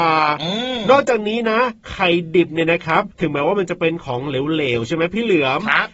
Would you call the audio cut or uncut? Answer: cut